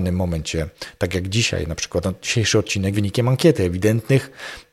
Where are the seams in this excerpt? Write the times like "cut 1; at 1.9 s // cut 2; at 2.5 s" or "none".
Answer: cut 1; at 2.0 s // cut 2; at 2.9 s